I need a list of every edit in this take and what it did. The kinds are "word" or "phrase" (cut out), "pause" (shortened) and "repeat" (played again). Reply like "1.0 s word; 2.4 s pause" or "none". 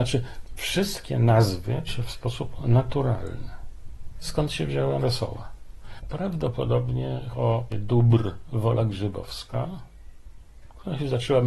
1.9 s word; 5.0 s word; 7.3 s word; 7.7 s word